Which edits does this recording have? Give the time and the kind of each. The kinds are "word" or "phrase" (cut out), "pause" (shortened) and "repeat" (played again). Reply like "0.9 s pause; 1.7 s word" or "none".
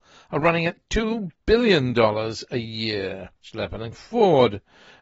3.4 s pause; 3.9 s word